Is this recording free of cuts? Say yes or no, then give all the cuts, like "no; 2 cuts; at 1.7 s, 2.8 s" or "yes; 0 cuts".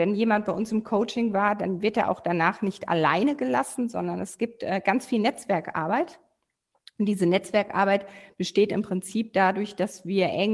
yes; 0 cuts